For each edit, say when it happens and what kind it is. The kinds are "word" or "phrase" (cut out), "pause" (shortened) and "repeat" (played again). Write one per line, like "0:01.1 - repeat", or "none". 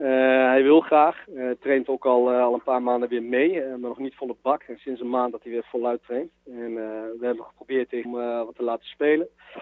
0:08.0 - phrase